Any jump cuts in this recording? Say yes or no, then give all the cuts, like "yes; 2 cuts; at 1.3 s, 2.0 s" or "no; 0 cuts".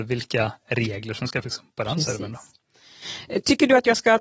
yes; 1 cut; at 1.4 s